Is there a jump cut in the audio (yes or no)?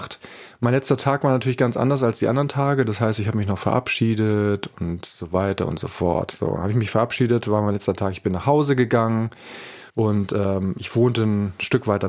yes